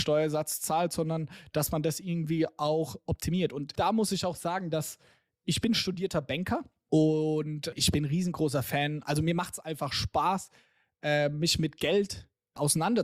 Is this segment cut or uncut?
uncut